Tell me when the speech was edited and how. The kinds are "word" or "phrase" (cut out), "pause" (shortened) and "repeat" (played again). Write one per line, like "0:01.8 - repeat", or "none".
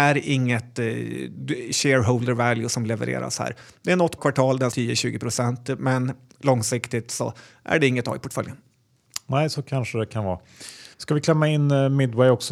0:04.2 - word
0:04.7 - phrase
0:10.9 - pause